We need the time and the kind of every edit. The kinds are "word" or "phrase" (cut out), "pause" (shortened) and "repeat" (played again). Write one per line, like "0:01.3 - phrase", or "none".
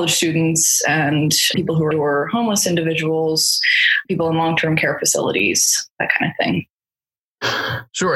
0:01.5 - word
0:01.9 - word
0:04.0 - word